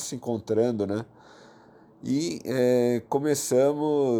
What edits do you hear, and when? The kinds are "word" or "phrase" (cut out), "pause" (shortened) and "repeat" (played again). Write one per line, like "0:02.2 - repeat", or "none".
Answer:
none